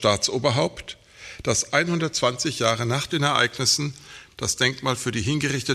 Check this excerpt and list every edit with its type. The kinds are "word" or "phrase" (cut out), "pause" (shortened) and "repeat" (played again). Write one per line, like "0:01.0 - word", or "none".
none